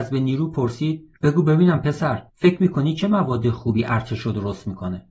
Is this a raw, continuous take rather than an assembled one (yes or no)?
no